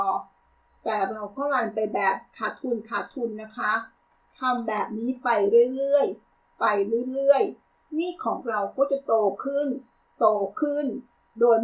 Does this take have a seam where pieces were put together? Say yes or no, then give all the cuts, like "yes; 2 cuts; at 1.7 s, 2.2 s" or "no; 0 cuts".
no; 0 cuts